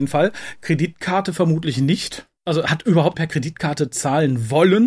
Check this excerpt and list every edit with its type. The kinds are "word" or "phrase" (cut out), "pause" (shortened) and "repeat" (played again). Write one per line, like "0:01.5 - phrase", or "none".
0:02.4 - pause
0:03.1 - word